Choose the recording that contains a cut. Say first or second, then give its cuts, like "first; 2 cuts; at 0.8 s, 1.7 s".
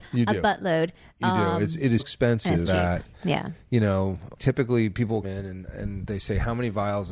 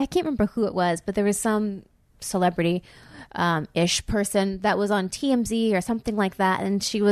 first; 4 cuts; at 2.0 s, 2.7 s, 4.4 s, 5.2 s